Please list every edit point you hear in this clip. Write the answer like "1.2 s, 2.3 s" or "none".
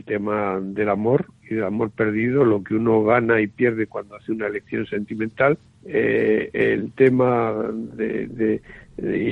5.6 s